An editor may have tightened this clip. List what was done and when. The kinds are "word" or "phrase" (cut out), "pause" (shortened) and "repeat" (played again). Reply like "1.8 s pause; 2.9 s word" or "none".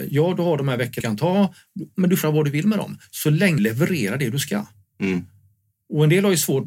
1.0 s word; 2.2 s word; 3.6 s word